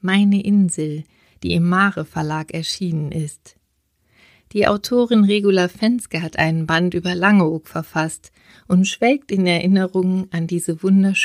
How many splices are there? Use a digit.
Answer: 0